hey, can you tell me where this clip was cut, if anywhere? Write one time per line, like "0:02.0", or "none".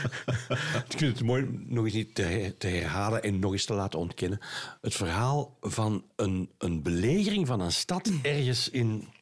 none